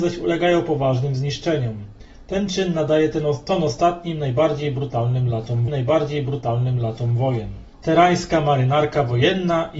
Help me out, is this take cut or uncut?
cut